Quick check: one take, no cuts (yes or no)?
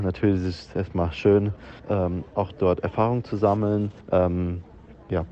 no